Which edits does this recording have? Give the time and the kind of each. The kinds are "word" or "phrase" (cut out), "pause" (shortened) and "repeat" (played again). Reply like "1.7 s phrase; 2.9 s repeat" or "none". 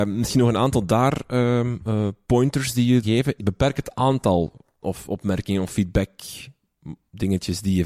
3.0 s word; 3.4 s word; 4.8 s word